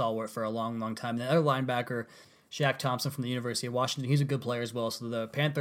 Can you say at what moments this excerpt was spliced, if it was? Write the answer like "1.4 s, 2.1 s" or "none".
none